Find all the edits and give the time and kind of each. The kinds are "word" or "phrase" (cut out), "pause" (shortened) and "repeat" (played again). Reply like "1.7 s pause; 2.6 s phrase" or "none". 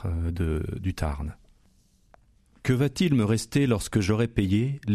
none